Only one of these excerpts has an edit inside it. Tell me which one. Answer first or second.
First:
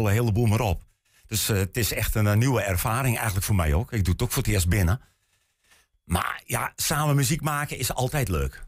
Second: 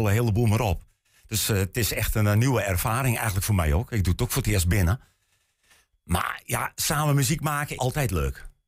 second